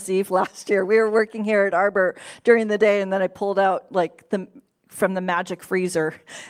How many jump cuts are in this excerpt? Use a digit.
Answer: 0